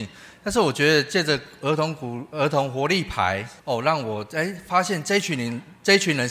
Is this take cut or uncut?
cut